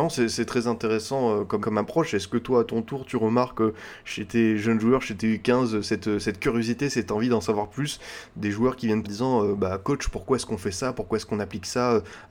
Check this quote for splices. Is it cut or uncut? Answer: cut